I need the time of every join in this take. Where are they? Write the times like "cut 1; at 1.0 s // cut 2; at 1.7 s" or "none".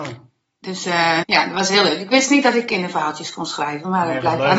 cut 1; at 1.2 s